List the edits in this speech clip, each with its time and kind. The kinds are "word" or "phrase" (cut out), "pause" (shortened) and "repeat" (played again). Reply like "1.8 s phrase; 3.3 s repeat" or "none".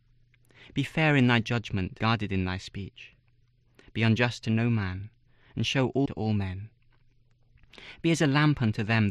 2.0 s word; 6.1 s word

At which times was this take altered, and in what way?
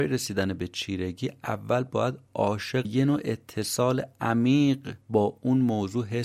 2.8 s phrase

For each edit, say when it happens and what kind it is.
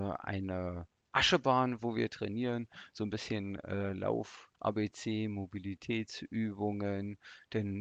4.5 s pause

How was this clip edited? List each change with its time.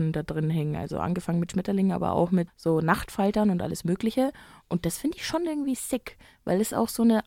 2.5 s word

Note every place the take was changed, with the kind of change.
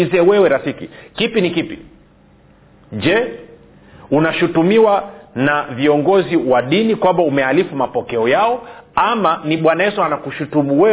none

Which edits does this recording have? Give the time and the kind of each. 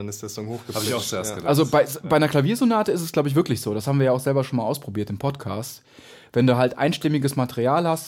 none

